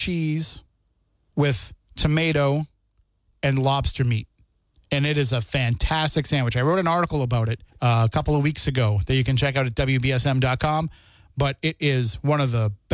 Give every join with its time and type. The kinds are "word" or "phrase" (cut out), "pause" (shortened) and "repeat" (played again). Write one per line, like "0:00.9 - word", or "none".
0:01.8 - pause
0:07.7 - pause